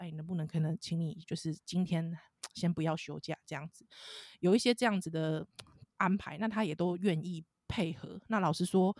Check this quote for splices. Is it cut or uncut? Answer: cut